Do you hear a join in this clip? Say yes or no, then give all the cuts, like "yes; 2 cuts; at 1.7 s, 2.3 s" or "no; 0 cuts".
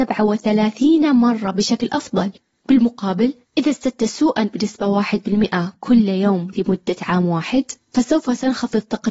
no; 0 cuts